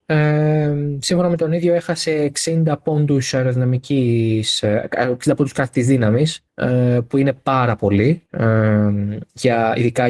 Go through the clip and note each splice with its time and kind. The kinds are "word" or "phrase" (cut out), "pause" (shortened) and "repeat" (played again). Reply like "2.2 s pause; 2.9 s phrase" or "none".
6.5 s pause; 8.3 s pause